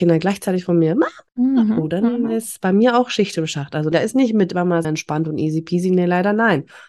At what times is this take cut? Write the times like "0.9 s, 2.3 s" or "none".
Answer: 1.3 s, 3.9 s, 4.8 s